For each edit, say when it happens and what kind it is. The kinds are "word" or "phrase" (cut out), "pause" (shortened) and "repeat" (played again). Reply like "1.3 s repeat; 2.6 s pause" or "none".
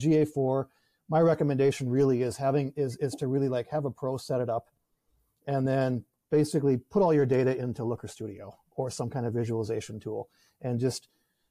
none